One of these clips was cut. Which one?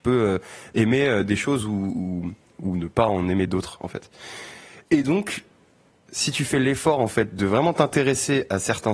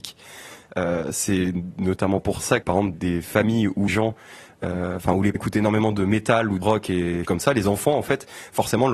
second; 6 cuts; at 2.6 s, 2.9 s, 3.9 s, 5.3 s, 6.6 s, 7.2 s

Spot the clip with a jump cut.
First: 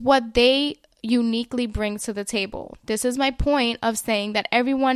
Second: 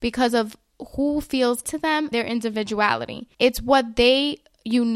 second; 3 cuts; at 1.6 s, 2.1 s, 3.3 s

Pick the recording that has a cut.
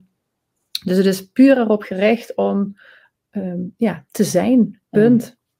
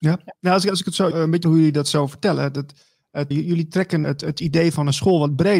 second; 4 cuts; at 1.1 s, 1.4 s, 3.3 s, 4.0 s

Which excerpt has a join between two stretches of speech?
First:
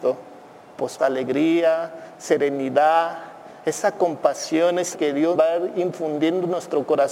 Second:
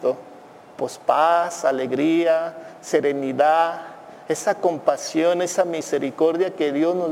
first; 3 cuts; at 1.0 s, 4.9 s, 5.3 s

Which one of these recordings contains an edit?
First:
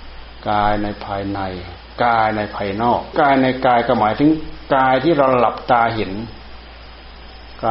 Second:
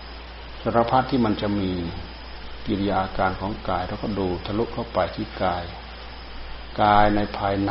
first; 1 cut; at 3.1 s

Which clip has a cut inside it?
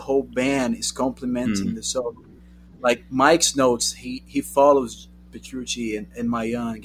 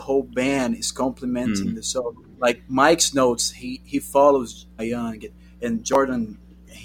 second; 2 cuts; at 2.3 s, 4.8 s

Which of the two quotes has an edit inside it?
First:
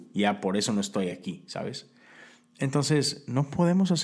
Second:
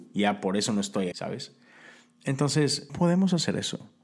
second; 2 cuts; at 1.1 s, 2.9 s

